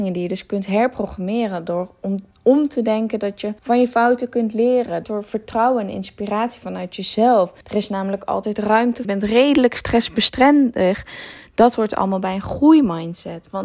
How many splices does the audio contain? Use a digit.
4